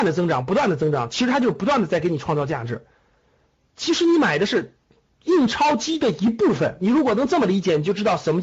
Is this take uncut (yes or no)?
yes